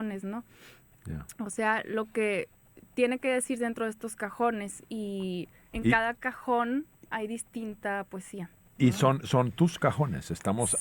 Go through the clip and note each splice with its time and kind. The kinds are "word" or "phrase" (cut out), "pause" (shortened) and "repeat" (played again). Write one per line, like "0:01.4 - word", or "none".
none